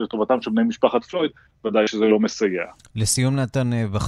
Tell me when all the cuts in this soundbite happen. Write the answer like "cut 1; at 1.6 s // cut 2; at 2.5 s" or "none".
none